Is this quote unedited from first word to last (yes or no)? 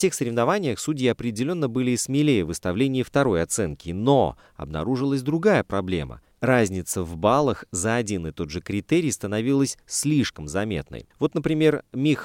no